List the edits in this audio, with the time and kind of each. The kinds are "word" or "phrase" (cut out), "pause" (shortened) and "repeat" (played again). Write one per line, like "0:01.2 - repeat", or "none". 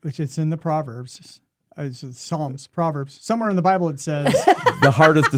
none